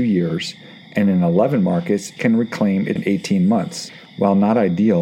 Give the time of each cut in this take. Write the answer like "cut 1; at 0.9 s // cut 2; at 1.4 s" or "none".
cut 1; at 2.2 s // cut 2; at 3.0 s